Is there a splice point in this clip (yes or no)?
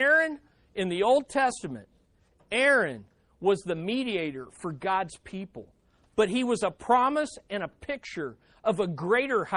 no